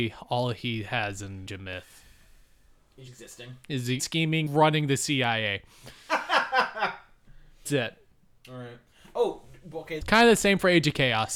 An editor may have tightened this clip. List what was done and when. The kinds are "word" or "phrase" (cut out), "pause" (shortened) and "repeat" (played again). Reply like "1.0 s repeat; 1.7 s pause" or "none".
1.5 s word; 3.1 s word; 4.0 s word; 4.5 s word; 7.7 s word; 10.0 s word